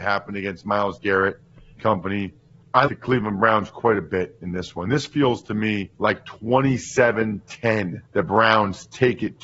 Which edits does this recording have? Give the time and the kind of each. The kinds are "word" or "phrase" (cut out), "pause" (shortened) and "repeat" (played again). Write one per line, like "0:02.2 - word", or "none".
0:01.8 - word
0:02.9 - word
0:06.0 - pause
0:08.1 - pause